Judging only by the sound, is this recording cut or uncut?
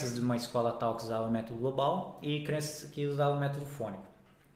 uncut